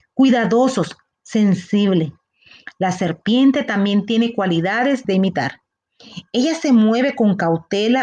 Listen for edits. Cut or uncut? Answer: cut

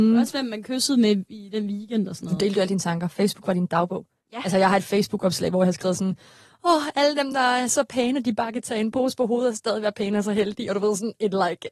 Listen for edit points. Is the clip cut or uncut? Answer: uncut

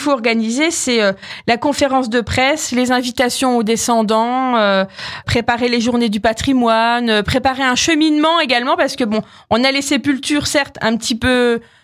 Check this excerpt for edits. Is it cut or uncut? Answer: uncut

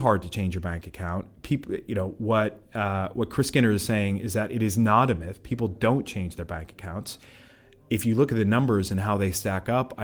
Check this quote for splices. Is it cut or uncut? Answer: uncut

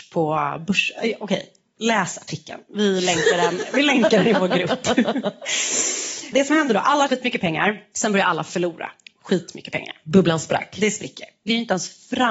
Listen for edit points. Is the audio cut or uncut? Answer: cut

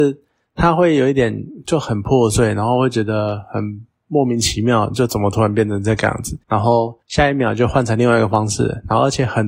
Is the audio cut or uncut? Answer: cut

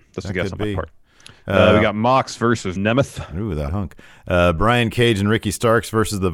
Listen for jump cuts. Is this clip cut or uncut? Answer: cut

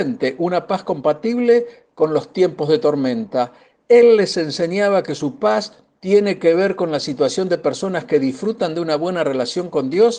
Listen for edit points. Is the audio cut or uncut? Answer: uncut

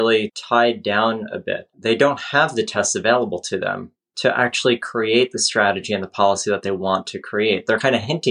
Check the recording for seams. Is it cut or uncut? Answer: cut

